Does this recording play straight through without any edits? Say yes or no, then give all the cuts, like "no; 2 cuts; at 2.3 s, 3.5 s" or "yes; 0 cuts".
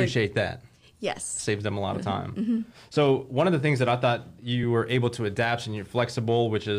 yes; 0 cuts